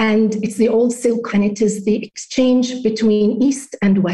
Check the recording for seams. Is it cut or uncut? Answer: cut